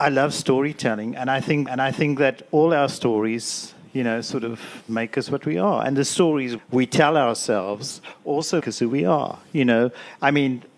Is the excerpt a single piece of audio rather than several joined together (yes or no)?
no